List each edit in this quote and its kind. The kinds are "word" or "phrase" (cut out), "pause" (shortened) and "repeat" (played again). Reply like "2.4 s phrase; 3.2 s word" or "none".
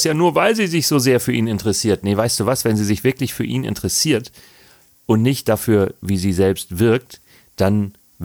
none